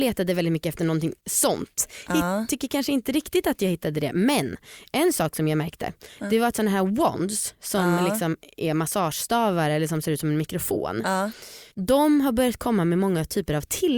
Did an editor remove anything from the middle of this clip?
yes; 1 cut; at 11.7 s

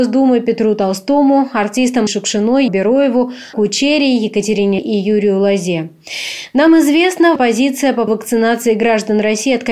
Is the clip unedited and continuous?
no; 6 cuts; at 2.1 s, 2.7 s, 3.5 s, 4.8 s, 7.4 s, 8.1 s

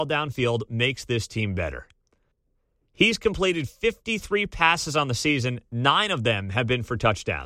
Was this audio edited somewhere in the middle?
yes; 1 cut; at 2.3 s

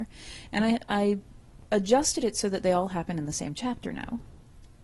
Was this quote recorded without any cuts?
yes; 0 cuts

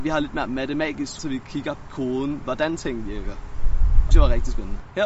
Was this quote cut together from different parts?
yes; 3 cuts; at 1.2 s, 1.9 s, 4.1 s

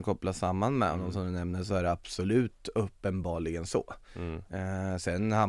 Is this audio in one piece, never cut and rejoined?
yes; 0 cuts

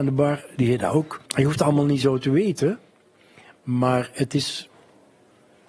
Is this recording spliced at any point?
yes; 1 cut; at 1.3 s

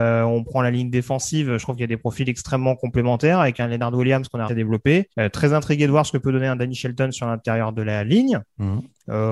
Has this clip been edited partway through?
yes; 2 cuts; at 4.5 s, 5.1 s

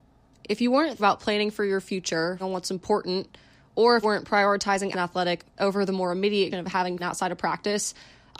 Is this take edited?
yes; 7 cuts; at 1.0 s, 2.4 s, 4.0 s, 4.9 s, 5.6 s, 6.5 s, 7.0 s

